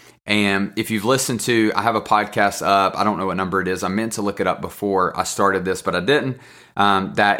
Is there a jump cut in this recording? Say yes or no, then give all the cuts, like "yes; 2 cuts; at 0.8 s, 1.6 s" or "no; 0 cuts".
no; 0 cuts